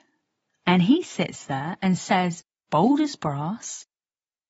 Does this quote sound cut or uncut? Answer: uncut